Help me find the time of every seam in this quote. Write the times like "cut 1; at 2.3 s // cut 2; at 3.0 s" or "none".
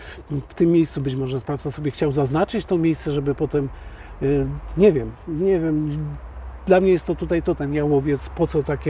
cut 1; at 7.6 s